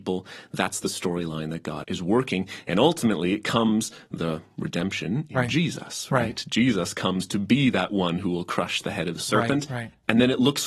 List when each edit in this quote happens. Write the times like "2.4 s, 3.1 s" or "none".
1.8 s